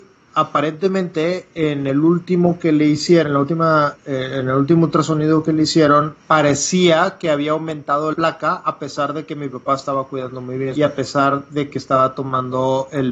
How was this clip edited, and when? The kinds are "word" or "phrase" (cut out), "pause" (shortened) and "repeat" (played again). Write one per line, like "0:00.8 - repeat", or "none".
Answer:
0:06.2 - pause
0:08.1 - word
0:10.8 - phrase